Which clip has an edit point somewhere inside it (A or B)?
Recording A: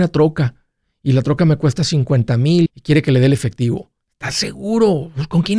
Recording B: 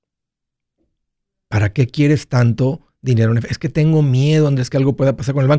A